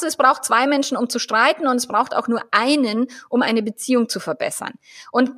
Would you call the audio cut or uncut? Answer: uncut